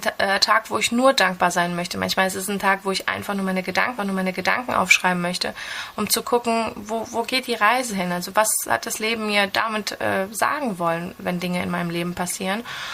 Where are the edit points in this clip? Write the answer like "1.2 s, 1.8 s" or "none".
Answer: 4.0 s